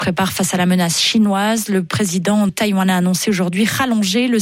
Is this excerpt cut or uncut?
cut